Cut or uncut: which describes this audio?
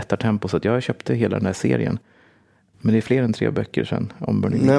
uncut